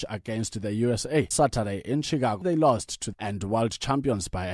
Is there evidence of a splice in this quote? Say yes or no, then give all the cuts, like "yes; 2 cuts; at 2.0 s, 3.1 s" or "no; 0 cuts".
yes; 3 cuts; at 1.3 s, 2.4 s, 3.1 s